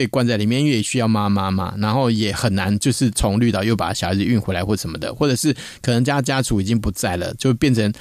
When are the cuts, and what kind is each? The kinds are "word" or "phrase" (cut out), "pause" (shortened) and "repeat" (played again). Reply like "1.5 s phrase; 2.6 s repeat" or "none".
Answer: none